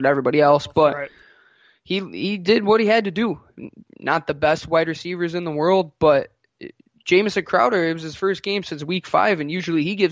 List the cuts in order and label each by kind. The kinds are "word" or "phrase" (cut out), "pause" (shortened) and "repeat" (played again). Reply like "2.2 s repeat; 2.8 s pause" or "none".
none